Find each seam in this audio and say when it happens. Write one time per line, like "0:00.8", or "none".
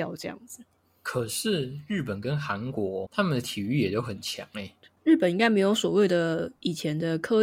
none